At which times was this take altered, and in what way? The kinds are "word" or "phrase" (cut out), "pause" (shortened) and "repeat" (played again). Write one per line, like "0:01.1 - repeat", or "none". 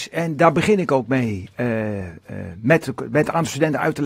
none